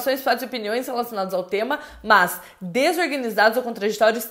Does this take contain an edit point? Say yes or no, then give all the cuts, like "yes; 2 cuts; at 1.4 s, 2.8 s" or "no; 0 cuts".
no; 0 cuts